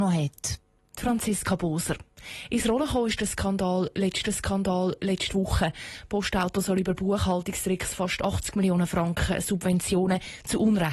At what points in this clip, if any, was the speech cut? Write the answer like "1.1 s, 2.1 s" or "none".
4.2 s